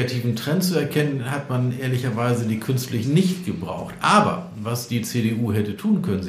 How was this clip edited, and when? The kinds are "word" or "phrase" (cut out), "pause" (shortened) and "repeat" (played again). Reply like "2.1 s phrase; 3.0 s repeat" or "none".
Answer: 3.0 s word